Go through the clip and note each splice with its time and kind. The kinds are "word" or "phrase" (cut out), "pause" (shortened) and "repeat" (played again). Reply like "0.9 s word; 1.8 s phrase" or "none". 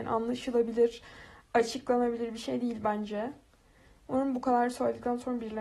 none